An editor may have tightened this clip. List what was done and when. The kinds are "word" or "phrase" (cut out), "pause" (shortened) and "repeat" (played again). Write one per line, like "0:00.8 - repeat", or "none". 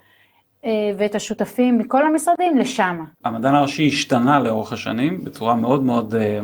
0:03.1 - pause

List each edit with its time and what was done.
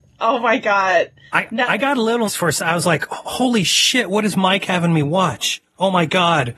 0:02.3 - word

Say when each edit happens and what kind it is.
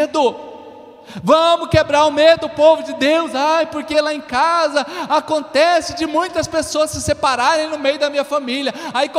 none

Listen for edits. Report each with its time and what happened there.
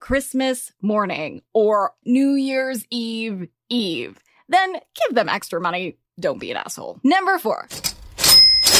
0:02.0 - word

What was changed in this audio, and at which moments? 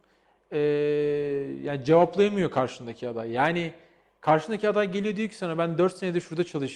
none

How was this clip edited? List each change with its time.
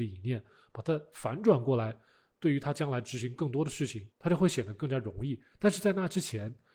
0:04.1 - pause

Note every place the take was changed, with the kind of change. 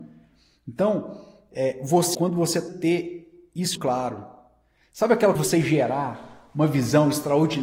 0:02.1 - word
0:02.7 - phrase
0:03.8 - word
0:05.4 - word

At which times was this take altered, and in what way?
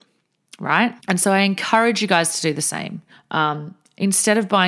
0:01.0 - pause
0:03.1 - pause

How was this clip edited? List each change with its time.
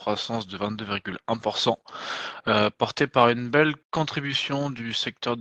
0:03.8 - pause

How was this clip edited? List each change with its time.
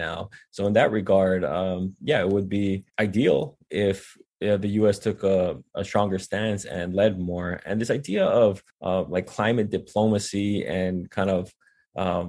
0:02.9 - pause
0:08.7 - pause

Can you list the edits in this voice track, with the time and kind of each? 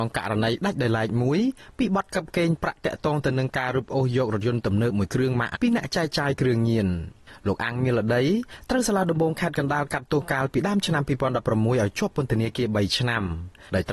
0:05.6 - word

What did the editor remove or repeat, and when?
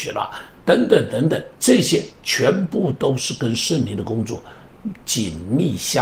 0:01.6 - pause

